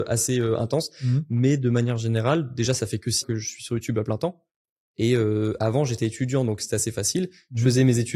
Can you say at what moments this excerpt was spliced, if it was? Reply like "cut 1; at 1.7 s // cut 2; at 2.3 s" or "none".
cut 1; at 3.2 s